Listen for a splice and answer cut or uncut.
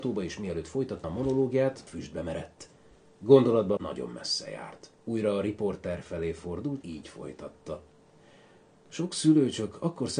cut